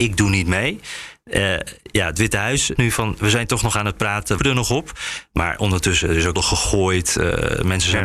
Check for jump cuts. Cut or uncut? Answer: cut